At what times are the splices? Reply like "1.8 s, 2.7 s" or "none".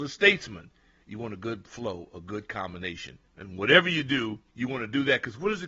3.3 s, 4.5 s